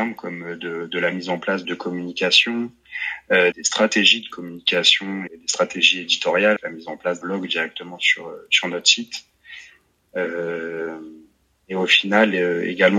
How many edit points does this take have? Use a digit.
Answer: 5